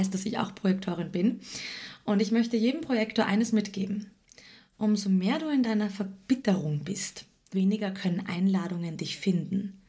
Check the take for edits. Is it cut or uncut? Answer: cut